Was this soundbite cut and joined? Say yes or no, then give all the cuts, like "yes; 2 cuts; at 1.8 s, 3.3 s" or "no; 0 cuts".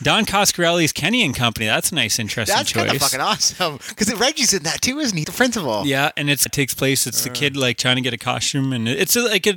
yes; 2 cuts; at 5.2 s, 6.5 s